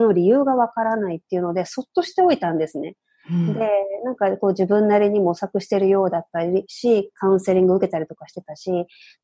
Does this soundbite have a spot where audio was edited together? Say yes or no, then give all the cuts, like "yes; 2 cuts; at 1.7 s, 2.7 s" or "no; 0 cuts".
no; 0 cuts